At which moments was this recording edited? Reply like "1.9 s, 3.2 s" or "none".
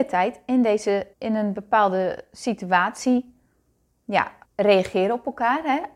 1.1 s, 4.4 s